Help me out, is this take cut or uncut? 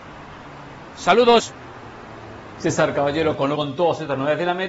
cut